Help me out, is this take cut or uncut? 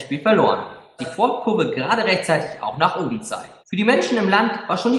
cut